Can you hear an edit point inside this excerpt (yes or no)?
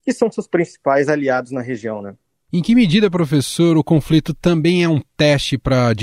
no